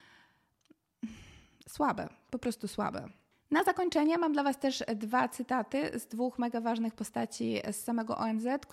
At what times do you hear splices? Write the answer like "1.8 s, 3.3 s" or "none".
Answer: none